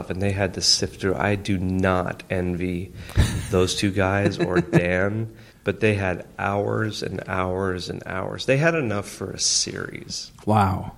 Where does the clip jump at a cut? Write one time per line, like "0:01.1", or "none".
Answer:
0:05.5